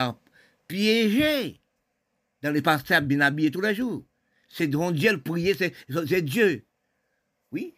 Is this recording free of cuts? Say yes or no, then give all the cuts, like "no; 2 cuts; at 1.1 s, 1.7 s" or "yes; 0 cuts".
yes; 0 cuts